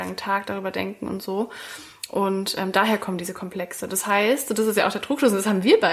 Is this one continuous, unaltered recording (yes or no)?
yes